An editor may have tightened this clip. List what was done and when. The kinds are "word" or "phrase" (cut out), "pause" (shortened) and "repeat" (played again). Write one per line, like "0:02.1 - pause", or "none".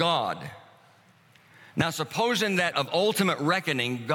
0:02.7 - word